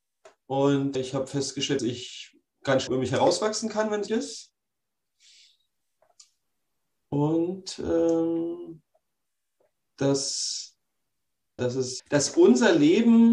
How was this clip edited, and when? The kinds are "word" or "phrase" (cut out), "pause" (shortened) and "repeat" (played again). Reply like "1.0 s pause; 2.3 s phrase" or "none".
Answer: 0.9 s word; 1.8 s word; 2.9 s word; 4.1 s word; 11.6 s word; 12.0 s word